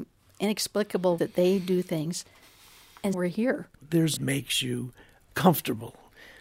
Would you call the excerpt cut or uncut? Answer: cut